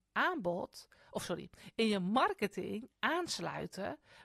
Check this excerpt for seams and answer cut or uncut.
cut